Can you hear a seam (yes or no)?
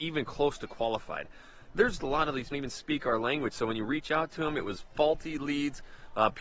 yes